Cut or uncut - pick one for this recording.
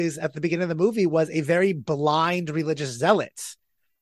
uncut